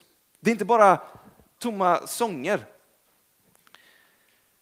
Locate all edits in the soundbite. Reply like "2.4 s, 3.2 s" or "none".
1.6 s